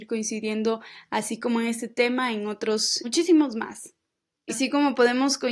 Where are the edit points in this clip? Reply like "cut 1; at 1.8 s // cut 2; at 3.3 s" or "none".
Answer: cut 1; at 3.0 s // cut 2; at 4.5 s